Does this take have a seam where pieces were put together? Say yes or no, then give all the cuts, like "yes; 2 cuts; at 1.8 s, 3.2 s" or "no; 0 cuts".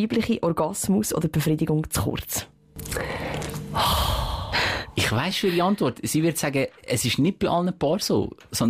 no; 0 cuts